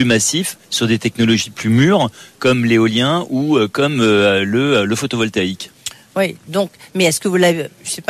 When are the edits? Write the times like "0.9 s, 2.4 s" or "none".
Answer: none